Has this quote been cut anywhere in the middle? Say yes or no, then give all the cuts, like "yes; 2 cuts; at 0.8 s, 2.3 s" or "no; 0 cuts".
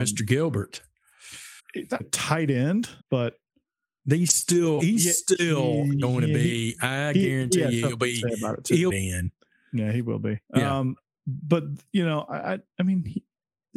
yes; 6 cuts; at 1.6 s, 2.0 s, 3.0 s, 4.8 s, 8.9 s, 10.4 s